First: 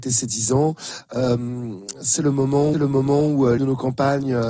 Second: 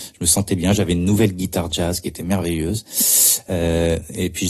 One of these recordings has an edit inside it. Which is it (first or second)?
first